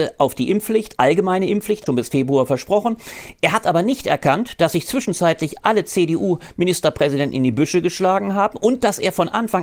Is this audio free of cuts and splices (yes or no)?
no